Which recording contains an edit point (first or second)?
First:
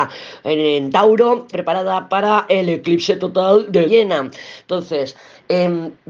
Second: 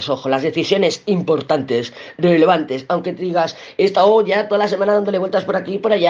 first